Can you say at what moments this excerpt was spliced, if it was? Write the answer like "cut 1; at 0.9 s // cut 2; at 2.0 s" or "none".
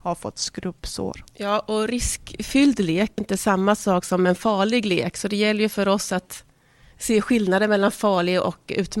cut 1; at 3.2 s